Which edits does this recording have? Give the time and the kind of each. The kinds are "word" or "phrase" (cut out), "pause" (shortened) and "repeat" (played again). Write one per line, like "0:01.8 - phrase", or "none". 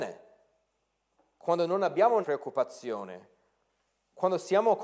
0:02.2 - word